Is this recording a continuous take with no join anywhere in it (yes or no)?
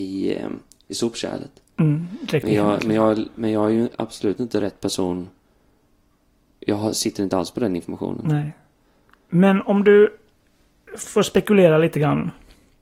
yes